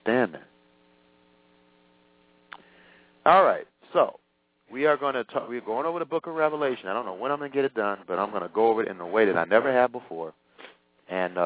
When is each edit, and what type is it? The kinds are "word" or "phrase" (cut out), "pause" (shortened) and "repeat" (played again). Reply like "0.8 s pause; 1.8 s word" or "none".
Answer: none